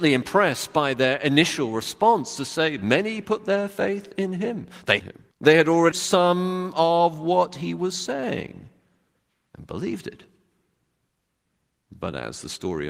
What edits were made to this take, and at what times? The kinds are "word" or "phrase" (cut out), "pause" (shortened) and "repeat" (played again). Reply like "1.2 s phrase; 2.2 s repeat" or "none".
5.0 s phrase; 5.3 s pause; 5.9 s word